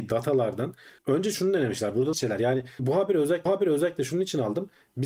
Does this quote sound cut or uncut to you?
cut